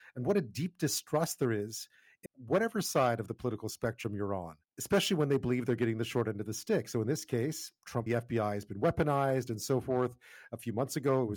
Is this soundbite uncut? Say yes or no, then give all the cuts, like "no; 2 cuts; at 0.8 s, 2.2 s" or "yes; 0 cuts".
no; 3 cuts; at 2.3 s, 4.7 s, 8.1 s